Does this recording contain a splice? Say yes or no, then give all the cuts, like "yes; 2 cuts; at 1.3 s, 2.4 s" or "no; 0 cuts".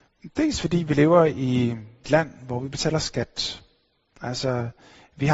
yes; 1 cut; at 2.0 s